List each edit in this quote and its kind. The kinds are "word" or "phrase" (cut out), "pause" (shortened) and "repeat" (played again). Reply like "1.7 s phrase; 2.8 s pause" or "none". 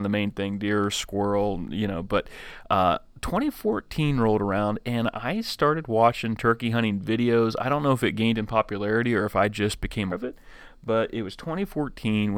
10.1 s word